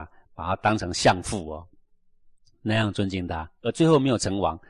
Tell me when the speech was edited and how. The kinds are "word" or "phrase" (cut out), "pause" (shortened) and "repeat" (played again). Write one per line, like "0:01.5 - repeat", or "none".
none